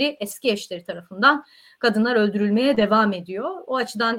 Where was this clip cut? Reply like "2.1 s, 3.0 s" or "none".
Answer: none